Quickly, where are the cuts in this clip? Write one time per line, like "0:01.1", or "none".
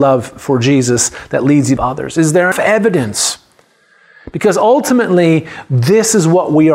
0:01.8
0:02.5